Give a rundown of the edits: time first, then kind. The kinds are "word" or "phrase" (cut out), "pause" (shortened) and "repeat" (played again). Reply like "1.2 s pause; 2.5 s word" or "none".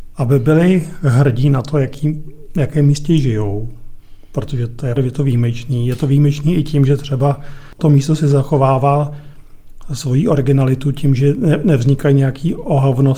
5.0 s phrase; 7.8 s word